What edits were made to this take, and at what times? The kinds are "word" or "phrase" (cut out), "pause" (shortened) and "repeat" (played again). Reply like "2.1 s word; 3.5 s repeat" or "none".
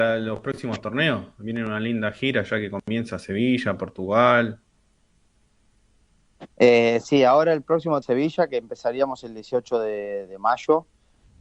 6.5 s pause; 8.0 s phrase

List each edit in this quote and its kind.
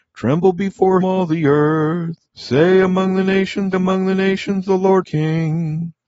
1.0 s word; 2.3 s pause; 3.7 s repeat; 5.0 s word

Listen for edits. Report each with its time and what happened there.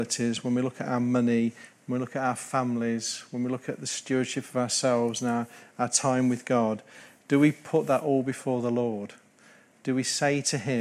none

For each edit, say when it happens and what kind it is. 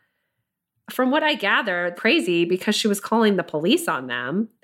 1.9 s phrase

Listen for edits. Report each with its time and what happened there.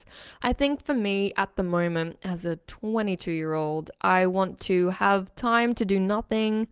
none

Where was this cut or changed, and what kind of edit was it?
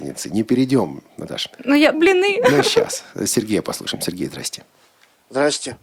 1.5 s pause; 1.9 s phrase

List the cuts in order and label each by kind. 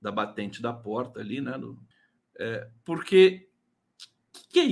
1.9 s pause

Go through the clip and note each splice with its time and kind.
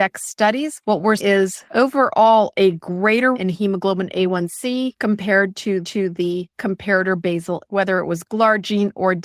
1.2 s word; 3.3 s word; 5.8 s repeat; 7.6 s word

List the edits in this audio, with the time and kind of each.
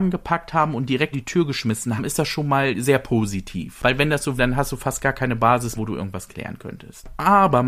1.1 s word; 2.0 s word; 4.4 s word; 5.7 s word

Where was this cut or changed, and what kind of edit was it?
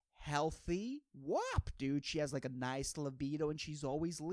1.1 s pause

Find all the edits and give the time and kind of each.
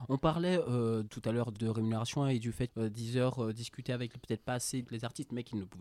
1.1 s word; 1.5 s word; 2.7 s word; 4.2 s word; 4.8 s word

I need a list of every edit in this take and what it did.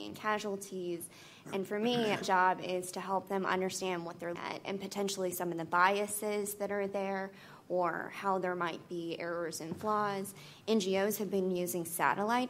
2.2 s word; 4.4 s word

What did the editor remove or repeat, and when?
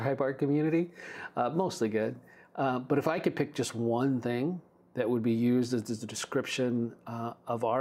none

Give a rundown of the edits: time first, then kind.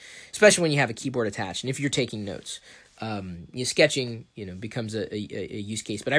none

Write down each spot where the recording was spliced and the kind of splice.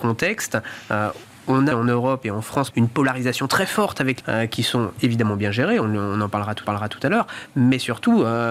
1.7 s word; 2.7 s word; 4.2 s phrase; 6.7 s repeat

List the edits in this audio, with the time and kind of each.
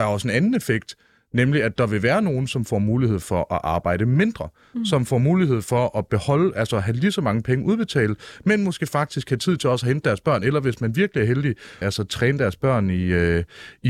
11.8 s word

